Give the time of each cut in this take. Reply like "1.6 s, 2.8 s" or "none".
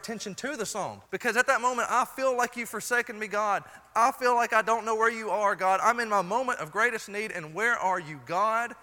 1.1 s